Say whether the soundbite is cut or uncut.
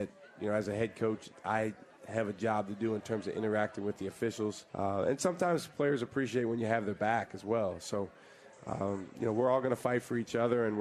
cut